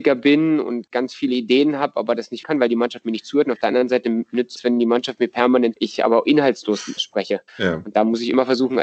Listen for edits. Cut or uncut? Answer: cut